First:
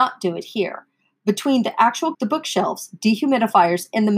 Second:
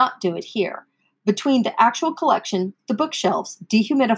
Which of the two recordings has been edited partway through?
first; 1 cut; at 2.1 s

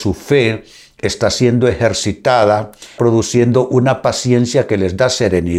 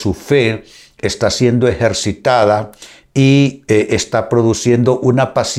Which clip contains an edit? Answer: first; 1 cut; at 3.0 s

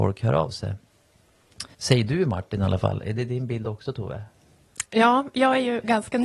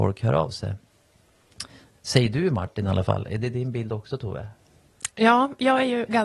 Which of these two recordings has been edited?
first; 1 cut; at 1.7 s

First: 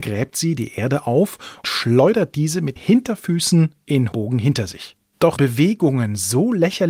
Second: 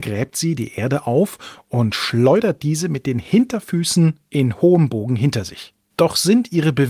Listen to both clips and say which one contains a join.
first; 4 cuts; at 1.6 s, 2.8 s, 4.1 s, 5.4 s

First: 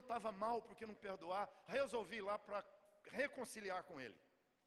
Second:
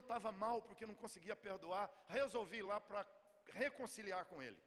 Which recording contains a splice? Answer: first; 1 cut; at 1.0 s

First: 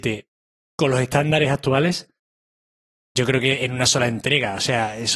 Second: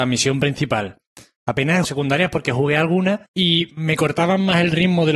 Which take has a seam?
second; 2 cuts; at 1.8 s, 3.3 s

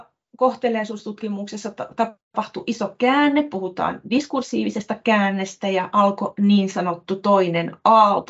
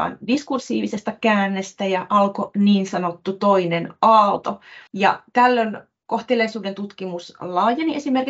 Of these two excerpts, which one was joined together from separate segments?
second; 1 cut; at 4.9 s

